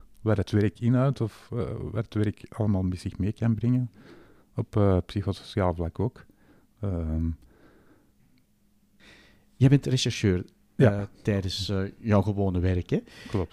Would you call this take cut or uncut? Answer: uncut